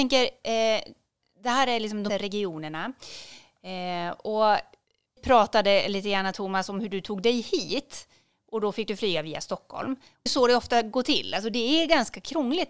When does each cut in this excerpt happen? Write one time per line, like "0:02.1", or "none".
0:02.1
0:05.2
0:10.3